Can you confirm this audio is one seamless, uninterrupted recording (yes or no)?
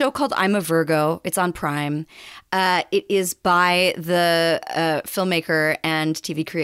yes